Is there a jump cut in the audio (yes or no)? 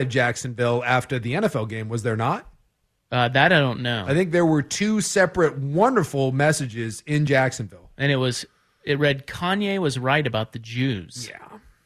no